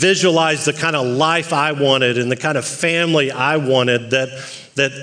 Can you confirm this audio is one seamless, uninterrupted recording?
yes; 0 cuts

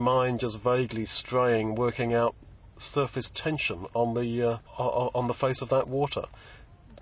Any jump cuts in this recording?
yes; 1 cut; at 4.7 s

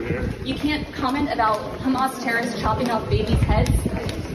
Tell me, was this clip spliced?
no; 0 cuts

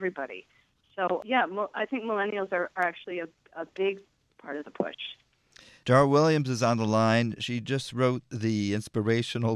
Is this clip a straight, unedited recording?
yes; 0 cuts

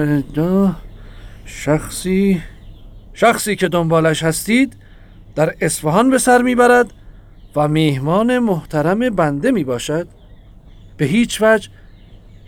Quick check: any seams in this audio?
no; 0 cuts

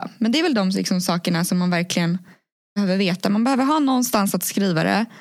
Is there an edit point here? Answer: no; 0 cuts

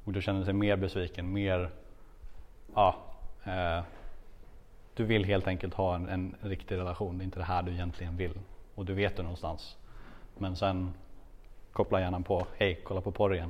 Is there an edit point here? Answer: no; 0 cuts

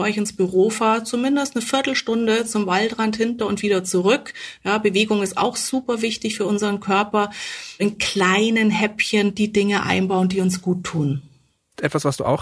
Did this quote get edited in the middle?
no; 0 cuts

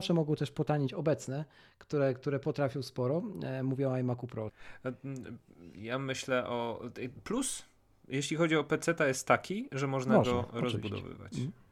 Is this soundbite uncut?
yes; 0 cuts

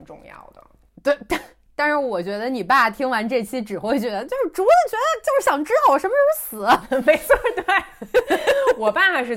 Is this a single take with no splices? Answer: yes; 0 cuts

